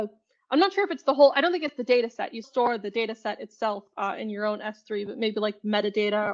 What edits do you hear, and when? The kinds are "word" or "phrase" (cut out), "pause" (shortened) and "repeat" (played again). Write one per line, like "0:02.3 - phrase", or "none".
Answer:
0:02.4 - word